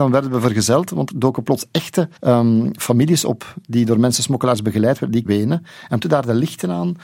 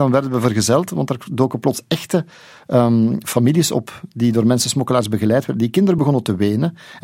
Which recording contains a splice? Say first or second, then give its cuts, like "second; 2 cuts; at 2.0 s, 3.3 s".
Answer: first; 4 cuts; at 1.1 s, 2.2 s, 5.3 s, 6.0 s